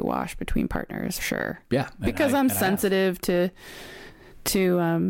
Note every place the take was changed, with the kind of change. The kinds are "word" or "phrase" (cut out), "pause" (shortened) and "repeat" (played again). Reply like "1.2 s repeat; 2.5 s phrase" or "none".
1.2 s word